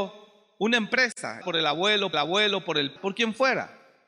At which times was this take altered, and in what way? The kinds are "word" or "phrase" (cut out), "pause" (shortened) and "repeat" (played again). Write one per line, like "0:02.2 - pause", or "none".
0:01.4 - word
0:02.1 - repeat
0:03.0 - word